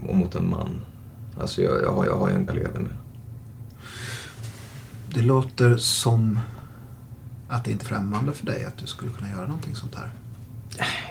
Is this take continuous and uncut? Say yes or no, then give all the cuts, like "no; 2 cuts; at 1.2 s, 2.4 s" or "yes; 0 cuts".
no; 3 cuts; at 2.1 s, 2.5 s, 7.8 s